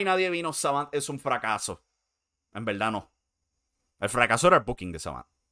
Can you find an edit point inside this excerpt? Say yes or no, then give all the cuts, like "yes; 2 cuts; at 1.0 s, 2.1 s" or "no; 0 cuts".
no; 0 cuts